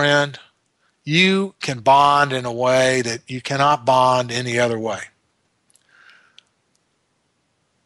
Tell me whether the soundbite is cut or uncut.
uncut